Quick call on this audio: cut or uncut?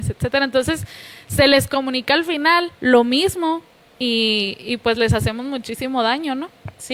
cut